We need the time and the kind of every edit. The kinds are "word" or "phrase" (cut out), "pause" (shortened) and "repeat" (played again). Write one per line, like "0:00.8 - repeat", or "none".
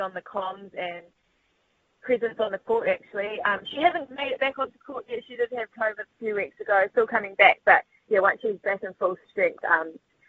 0:04.1 - word
0:06.0 - word
0:06.9 - word

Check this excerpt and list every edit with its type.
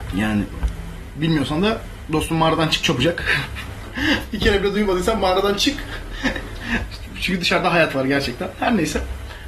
none

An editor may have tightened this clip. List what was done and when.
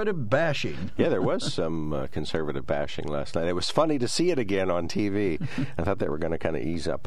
none

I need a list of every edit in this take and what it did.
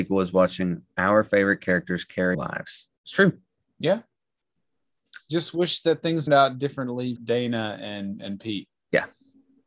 0:02.3 - phrase
0:03.0 - pause
0:03.6 - pause
0:06.3 - phrase
0:07.2 - word

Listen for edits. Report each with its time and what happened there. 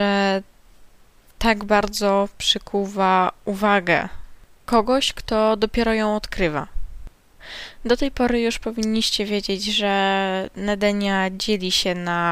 none

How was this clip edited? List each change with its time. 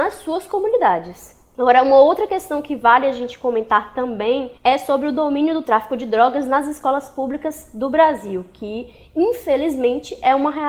0:04.6 - pause

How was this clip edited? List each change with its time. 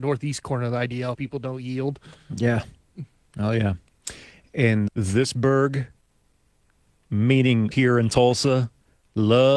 0:01.1 - word
0:04.9 - word
0:07.7 - word

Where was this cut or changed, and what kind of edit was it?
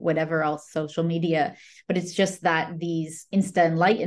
none

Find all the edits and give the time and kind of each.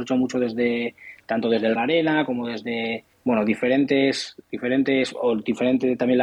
0:01.8 - phrase
0:03.1 - pause

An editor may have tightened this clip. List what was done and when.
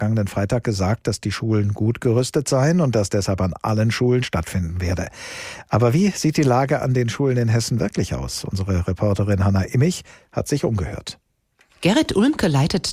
0:04.2 - phrase

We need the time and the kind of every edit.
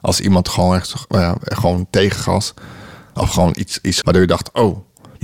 0:04.0 - word

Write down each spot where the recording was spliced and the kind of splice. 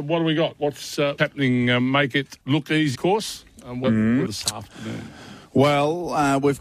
0:01.2 - word
0:02.4 - pause
0:02.9 - phrase
0:03.8 - phrase
0:04.3 - phrase

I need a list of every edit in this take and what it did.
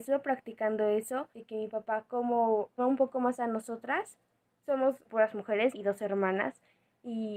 0:01.3 - pause
0:02.8 - phrase
0:05.0 - word
0:05.7 - phrase

